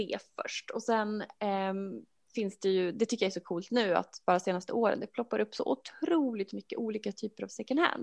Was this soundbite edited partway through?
no; 0 cuts

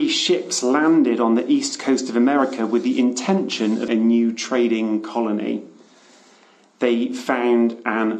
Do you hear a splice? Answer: yes; 1 cut; at 3.9 s

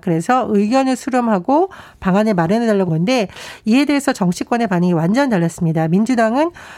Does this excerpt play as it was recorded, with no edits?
no; 1 cut; at 2.9 s

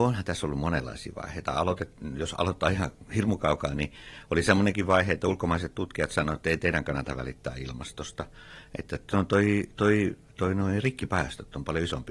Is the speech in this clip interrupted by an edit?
no; 0 cuts

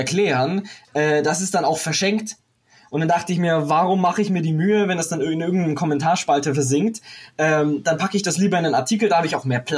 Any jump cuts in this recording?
no; 0 cuts

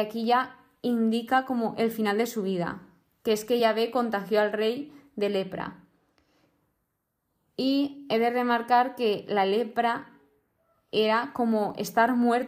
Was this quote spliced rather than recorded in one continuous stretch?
no; 0 cuts

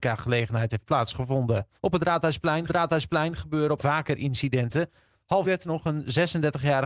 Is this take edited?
yes; 4 cuts; at 1.8 s, 2.7 s, 3.8 s, 5.4 s

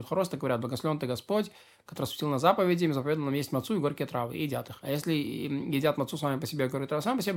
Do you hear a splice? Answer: no; 0 cuts

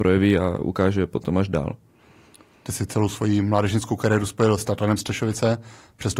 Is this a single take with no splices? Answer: yes; 0 cuts

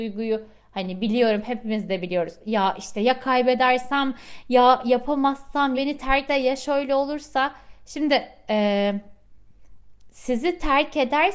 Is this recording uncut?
no; 2 cuts; at 5.8 s, 6.3 s

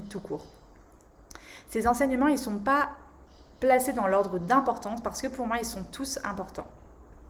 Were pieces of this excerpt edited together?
no; 0 cuts

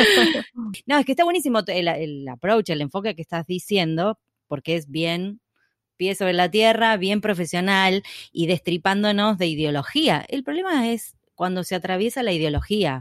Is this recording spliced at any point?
no; 0 cuts

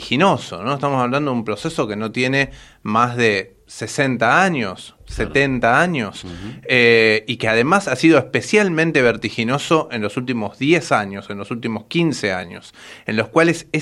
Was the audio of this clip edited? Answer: no; 0 cuts

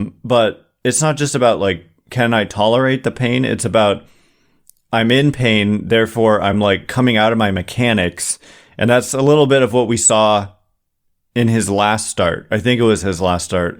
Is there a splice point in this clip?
no; 0 cuts

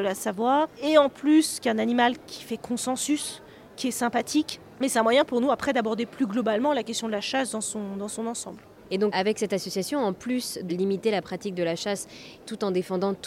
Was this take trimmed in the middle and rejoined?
yes; 2 cuts; at 9.1 s, 10.7 s

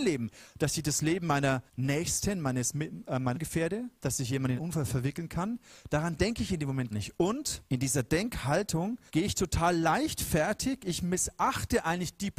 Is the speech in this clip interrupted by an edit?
yes; 7 cuts; at 1.7 s, 3.3 s, 4.0 s, 4.6 s, 6.9 s, 7.7 s, 9.1 s

